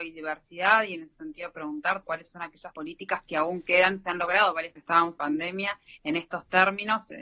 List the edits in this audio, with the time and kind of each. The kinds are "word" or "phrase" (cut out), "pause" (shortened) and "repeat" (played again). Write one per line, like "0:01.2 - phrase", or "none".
0:02.0 - word
0:04.8 - phrase
0:05.2 - word